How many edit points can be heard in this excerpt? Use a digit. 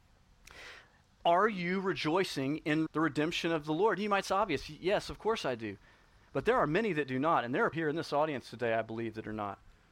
3